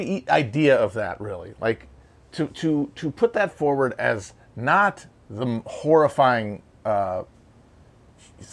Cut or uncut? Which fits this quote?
uncut